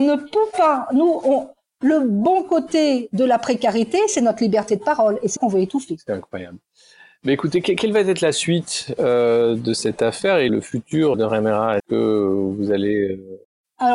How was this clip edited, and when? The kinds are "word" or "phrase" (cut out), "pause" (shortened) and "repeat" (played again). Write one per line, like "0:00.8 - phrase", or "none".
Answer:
0:05.4 - word
0:10.5 - word
0:11.1 - word
0:11.8 - word